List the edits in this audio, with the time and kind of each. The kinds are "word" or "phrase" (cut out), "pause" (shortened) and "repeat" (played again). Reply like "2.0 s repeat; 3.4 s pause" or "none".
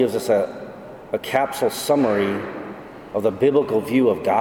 none